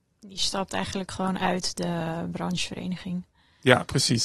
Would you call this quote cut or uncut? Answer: uncut